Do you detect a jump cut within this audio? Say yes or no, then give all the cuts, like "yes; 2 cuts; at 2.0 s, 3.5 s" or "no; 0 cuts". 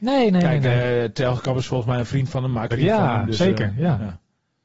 yes; 1 cut; at 2.7 s